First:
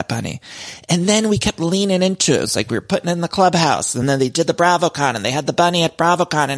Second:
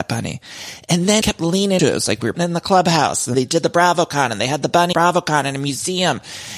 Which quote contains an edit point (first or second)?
second